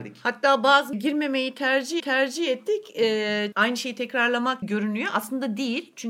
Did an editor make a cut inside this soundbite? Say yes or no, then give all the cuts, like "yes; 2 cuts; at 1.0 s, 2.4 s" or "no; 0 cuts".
yes; 4 cuts; at 0.9 s, 2.0 s, 3.5 s, 4.6 s